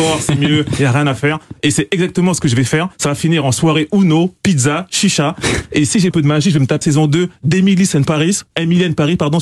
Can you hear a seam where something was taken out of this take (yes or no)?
yes